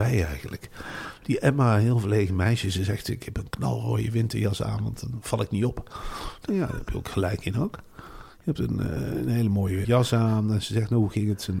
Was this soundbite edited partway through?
yes; 1 cut; at 9.8 s

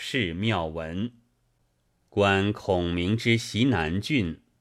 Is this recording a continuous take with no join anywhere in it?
yes; 0 cuts

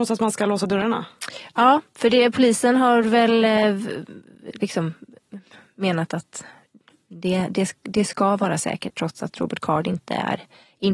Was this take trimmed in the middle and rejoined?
no; 0 cuts

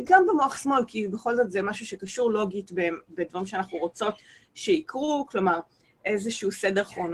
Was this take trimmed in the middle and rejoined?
no; 0 cuts

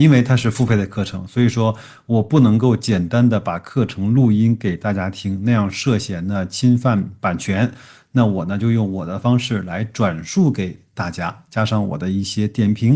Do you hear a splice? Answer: no; 0 cuts

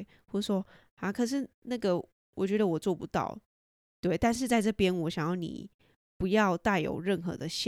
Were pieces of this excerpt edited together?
no; 0 cuts

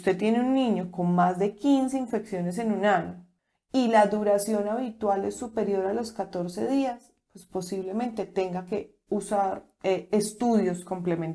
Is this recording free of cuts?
yes; 0 cuts

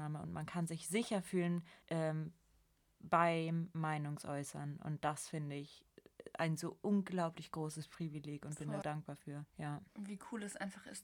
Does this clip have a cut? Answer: yes; 3 cuts; at 1.8 s, 8.8 s, 9.5 s

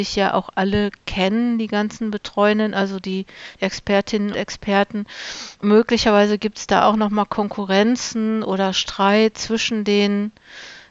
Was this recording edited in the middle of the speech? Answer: yes; 3 cuts; at 3.5 s, 4.3 s, 5.5 s

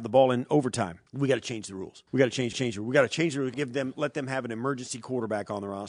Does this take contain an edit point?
yes; 4 cuts; at 1.1 s, 2.1 s, 2.5 s, 3.5 s

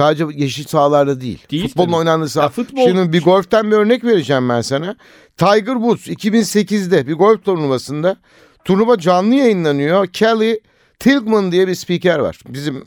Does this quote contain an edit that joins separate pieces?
no; 0 cuts

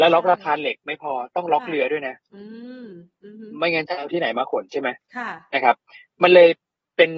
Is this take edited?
no; 0 cuts

